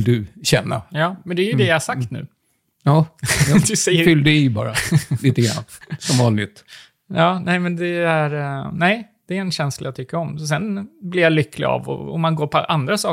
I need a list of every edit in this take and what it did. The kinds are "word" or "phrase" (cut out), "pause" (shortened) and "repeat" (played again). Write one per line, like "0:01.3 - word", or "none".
none